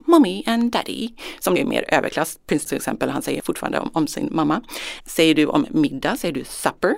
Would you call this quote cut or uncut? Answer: cut